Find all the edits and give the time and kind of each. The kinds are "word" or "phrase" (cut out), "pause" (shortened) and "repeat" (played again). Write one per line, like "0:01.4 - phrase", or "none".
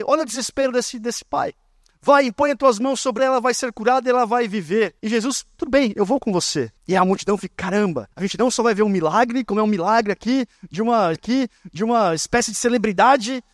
0:01.8 - pause
0:03.2 - word
0:05.0 - pause
0:06.8 - pause
0:08.1 - pause
0:11.1 - repeat

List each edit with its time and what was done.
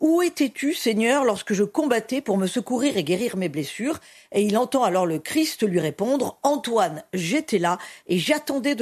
none

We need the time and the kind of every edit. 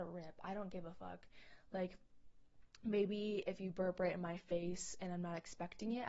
none

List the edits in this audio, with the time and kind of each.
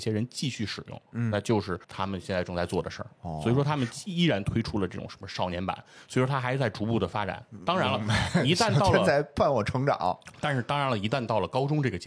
0:01.8 - pause

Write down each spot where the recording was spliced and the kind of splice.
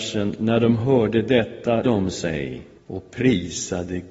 0:01.8 - word
0:02.8 - pause

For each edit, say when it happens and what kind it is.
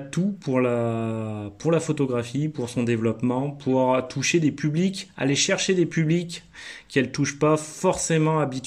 none

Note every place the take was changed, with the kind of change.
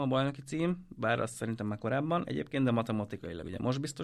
none

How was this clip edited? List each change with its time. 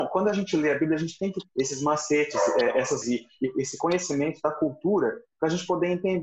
0:01.5 - word
0:03.0 - word

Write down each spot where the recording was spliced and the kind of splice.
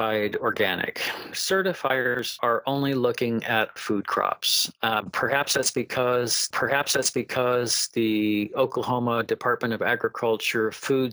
0:01.3 - phrase
0:03.8 - word
0:06.5 - repeat

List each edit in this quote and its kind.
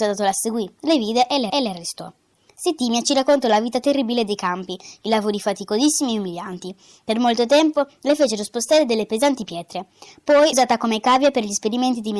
0:01.5 - repeat
0:10.5 - word

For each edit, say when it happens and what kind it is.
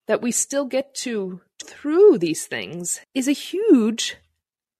0:01.6 - word
0:03.0 - pause

